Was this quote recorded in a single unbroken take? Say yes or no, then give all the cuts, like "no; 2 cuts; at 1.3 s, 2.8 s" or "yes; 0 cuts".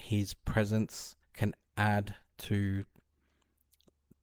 no; 1 cut; at 1.2 s